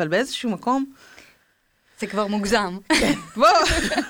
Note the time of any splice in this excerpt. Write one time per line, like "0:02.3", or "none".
none

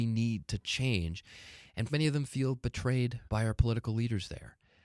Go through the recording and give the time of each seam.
0:01.9
0:03.3

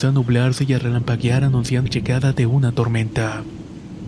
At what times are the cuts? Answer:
0:01.9

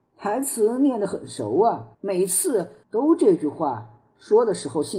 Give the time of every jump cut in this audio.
0:01.9
0:02.8

